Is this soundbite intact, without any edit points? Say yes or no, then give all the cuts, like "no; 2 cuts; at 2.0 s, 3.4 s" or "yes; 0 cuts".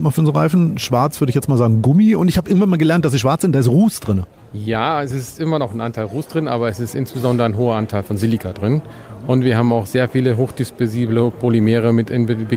yes; 0 cuts